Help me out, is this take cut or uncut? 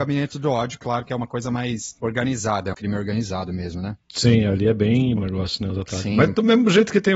cut